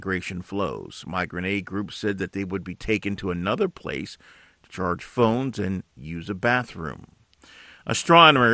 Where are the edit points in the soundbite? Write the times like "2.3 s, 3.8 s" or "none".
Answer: none